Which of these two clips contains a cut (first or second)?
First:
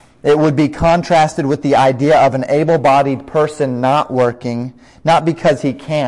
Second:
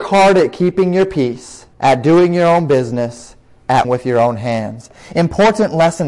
second